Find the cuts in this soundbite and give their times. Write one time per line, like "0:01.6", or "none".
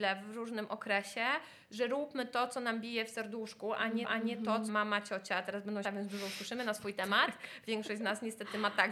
0:04.0
0:04.7
0:05.8